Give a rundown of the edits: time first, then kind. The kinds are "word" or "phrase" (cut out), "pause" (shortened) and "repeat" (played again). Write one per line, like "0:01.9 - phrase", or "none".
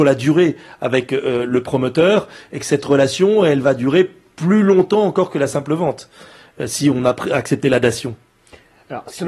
none